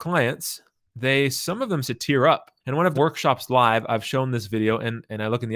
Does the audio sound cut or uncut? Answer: cut